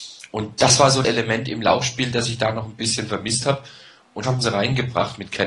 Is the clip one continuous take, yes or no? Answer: no